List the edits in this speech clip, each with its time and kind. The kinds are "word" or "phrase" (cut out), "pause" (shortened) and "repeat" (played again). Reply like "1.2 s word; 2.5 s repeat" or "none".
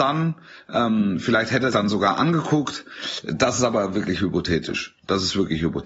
1.7 s word